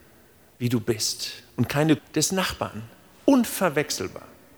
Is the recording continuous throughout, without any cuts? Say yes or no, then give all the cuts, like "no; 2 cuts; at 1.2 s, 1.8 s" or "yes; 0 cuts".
no; 1 cut; at 2.0 s